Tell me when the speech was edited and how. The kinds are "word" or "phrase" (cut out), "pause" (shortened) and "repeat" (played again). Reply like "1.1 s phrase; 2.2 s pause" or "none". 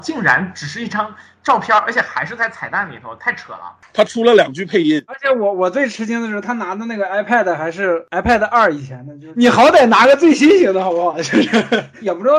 none

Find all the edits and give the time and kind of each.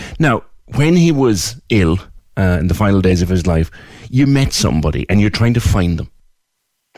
none

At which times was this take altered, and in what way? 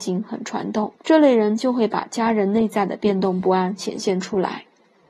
1.0 s pause

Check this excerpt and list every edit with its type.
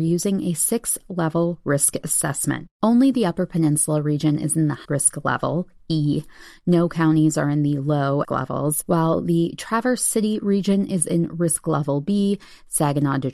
2.7 s pause; 4.8 s word; 8.2 s phrase

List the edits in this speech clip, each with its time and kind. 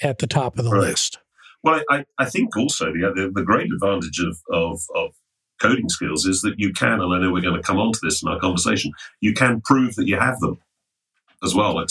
none

